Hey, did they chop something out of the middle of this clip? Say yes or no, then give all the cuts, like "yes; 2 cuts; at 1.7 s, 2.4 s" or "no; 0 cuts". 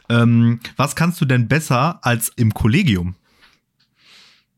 yes; 1 cut; at 2.4 s